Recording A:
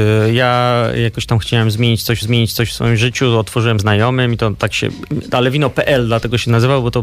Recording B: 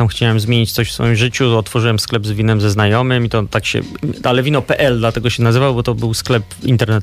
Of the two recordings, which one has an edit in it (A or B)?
A